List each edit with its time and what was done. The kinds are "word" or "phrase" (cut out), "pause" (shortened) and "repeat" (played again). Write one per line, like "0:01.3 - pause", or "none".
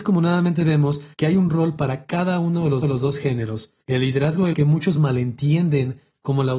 0:01.1 - pause
0:02.8 - repeat
0:03.8 - pause
0:04.5 - phrase

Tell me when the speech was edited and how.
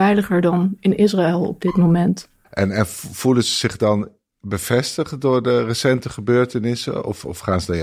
none

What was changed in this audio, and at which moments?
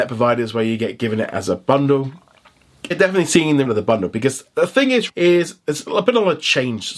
0:02.9 - word
0:03.6 - word
0:05.1 - word

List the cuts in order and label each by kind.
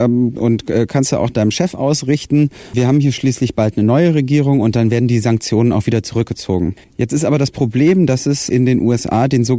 0:06.8 - pause

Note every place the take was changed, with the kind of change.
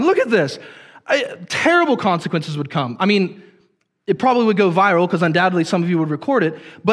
none

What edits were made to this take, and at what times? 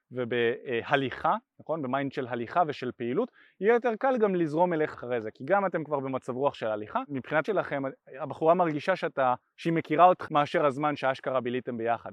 0:04.9 - word
0:07.4 - word
0:10.3 - word

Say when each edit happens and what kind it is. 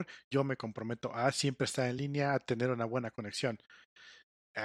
none

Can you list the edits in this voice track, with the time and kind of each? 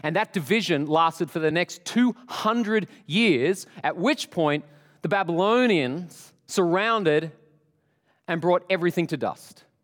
none

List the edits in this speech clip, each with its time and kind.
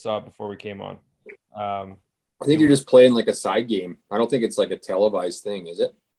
none

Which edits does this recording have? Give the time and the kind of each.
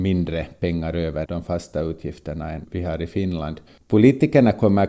0:01.3 - word
0:03.7 - pause

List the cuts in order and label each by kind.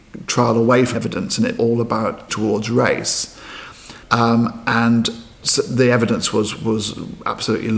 0:00.9 - word
0:01.6 - word
0:02.3 - word
0:04.0 - pause
0:05.4 - word

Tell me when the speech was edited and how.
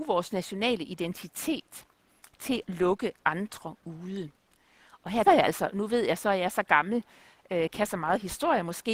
0:02.6 - word
0:05.2 - word

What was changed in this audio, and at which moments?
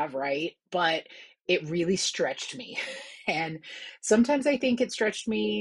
none

